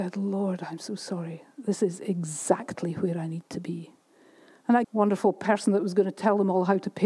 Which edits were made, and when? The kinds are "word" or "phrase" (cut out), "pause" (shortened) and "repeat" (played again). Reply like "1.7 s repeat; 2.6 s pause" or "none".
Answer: 4.8 s phrase